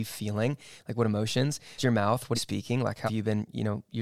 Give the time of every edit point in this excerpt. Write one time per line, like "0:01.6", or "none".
0:01.8
0:02.3
0:03.1